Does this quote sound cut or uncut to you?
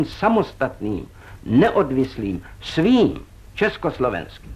uncut